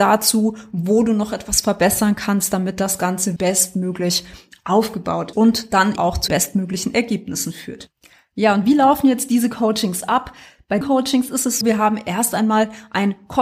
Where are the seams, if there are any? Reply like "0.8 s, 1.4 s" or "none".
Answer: 3.4 s, 5.3 s, 6.0 s, 6.3 s, 10.8 s, 11.6 s